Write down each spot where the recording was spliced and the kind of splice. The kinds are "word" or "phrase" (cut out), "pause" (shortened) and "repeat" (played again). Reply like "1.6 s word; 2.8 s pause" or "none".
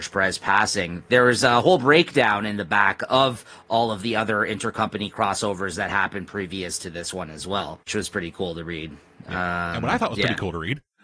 7.8 s pause